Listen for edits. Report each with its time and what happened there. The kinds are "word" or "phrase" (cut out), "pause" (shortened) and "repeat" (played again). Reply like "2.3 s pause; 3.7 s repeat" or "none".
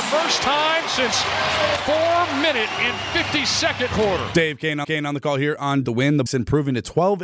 1.8 s word; 3.9 s phrase; 4.8 s repeat; 5.8 s phrase; 6.3 s word